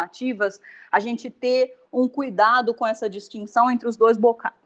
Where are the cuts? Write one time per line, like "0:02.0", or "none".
none